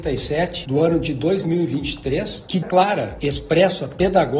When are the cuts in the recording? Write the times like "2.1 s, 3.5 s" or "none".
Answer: 2.6 s